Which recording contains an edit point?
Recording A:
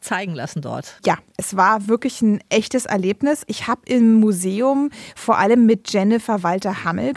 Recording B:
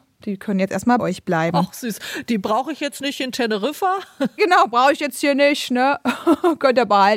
B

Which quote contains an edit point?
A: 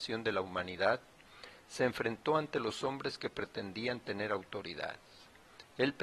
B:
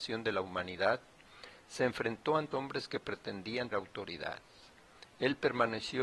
B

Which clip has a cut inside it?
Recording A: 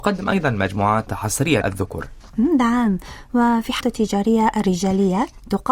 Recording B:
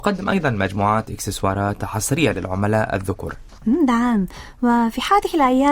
A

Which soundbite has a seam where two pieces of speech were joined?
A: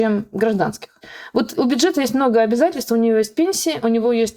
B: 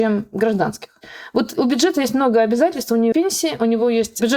B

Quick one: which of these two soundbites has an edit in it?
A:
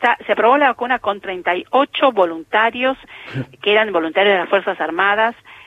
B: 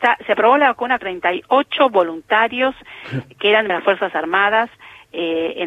B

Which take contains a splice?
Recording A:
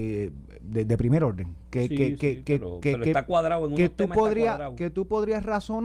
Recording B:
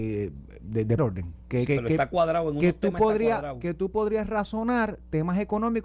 B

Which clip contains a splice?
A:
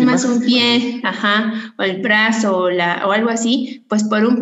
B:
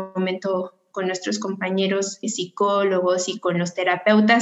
B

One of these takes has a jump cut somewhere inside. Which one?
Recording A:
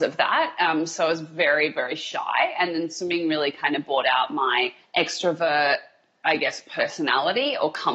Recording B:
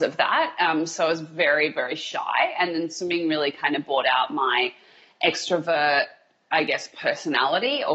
A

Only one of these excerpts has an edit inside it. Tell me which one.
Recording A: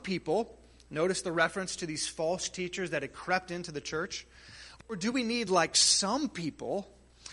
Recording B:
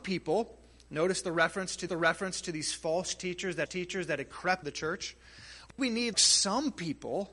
B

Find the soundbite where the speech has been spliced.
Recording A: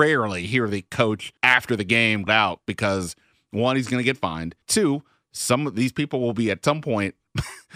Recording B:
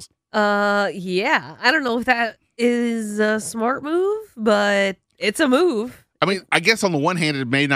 A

